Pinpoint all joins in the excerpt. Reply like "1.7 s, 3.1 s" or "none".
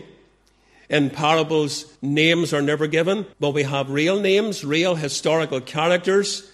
2.0 s, 3.3 s